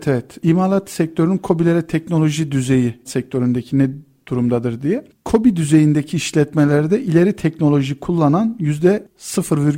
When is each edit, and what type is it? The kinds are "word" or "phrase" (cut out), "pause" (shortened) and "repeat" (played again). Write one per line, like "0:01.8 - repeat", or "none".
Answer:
0:03.0 - word